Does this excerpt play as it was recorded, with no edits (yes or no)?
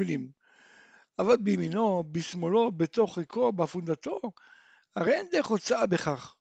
yes